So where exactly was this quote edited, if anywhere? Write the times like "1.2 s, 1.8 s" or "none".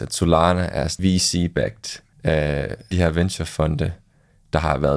1.0 s, 2.1 s, 2.9 s